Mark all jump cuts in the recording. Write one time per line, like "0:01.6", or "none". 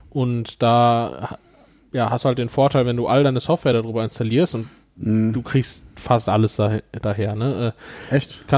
none

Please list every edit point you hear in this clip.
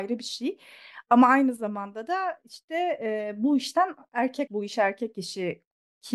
0:04.5

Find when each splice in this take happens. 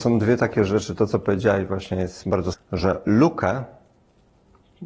0:02.5

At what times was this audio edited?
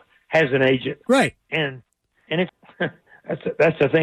0:01.1
0:01.4
0:02.5

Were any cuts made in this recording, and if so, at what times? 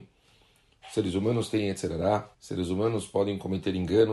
0:02.3

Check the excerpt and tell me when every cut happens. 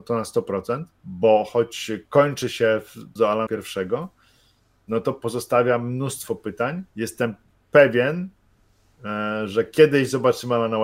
0:00.9
0:03.2
0:03.5
0:06.9

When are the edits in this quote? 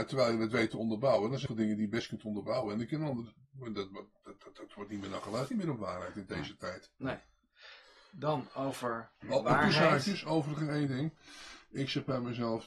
0:01.5
0:05.5

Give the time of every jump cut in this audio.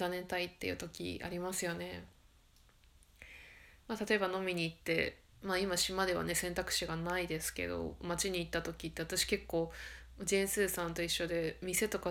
0:05.3

